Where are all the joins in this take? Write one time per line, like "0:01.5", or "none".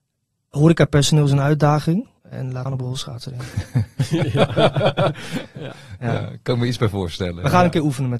0:02.2
0:02.7